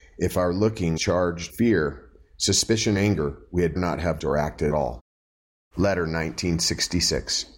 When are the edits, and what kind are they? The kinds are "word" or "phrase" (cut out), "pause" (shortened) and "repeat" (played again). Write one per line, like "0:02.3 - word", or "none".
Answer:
0:01.0 - word
0:01.5 - word
0:03.0 - word
0:03.8 - word
0:04.2 - word
0:04.7 - word

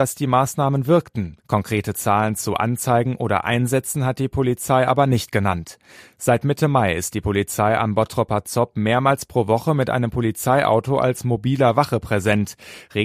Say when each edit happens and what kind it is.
0:01.4 - pause

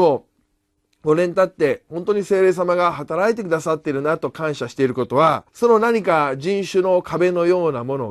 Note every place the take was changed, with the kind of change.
0:05.5 - pause

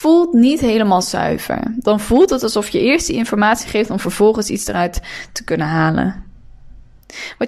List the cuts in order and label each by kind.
none

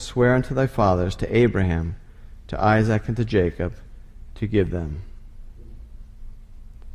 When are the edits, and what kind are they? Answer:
none

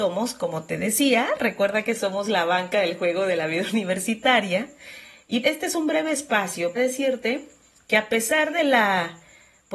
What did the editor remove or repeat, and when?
0:05.4 - word
0:06.8 - word

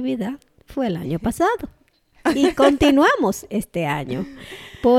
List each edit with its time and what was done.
none

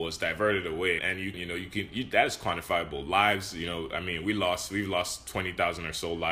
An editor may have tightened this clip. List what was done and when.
0:01.0 - word
0:01.3 - word

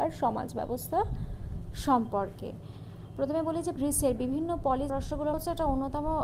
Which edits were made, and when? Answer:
0:03.8 - word
0:04.9 - phrase
0:05.3 - phrase

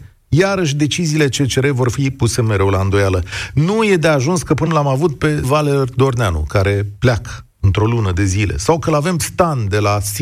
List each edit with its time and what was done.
0:04.7 - word
0:05.4 - word
0:07.5 - pause
0:09.2 - phrase

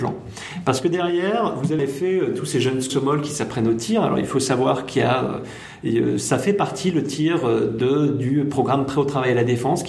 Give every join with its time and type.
0:01.8 - word
0:02.9 - word

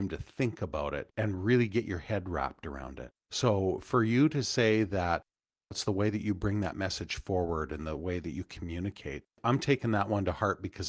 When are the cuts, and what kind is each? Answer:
none

